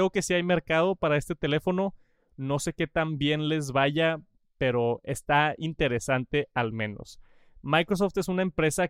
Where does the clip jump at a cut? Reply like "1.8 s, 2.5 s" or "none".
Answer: none